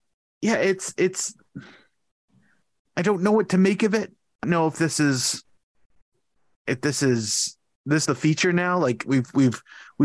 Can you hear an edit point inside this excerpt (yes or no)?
yes